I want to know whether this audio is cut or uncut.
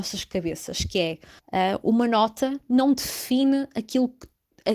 cut